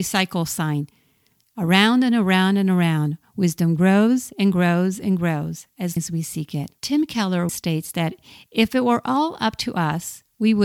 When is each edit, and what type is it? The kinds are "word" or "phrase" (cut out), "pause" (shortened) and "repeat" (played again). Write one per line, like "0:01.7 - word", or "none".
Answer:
0:06.0 - word
0:06.8 - pause
0:07.5 - word